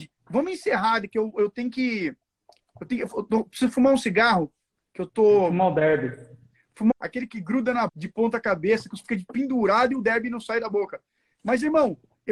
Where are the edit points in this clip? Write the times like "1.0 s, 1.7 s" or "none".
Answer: 4.8 s, 6.9 s, 7.9 s, 9.0 s